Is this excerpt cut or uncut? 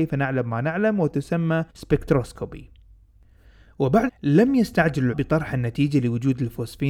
cut